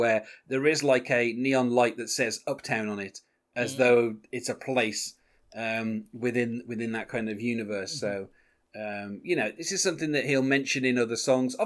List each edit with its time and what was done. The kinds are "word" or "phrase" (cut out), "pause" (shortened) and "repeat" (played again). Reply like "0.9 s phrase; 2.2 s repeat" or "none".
none